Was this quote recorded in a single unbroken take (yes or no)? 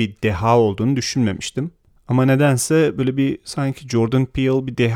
yes